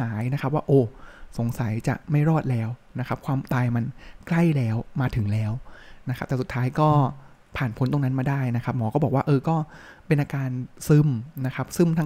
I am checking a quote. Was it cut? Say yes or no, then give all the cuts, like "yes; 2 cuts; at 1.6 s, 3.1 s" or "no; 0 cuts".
no; 0 cuts